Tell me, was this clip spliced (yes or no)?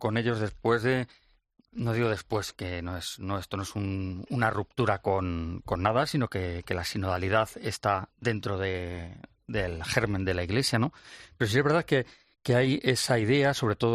no